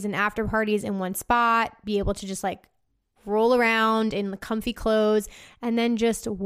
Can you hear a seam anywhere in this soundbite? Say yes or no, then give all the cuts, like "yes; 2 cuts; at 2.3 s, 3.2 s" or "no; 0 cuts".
no; 0 cuts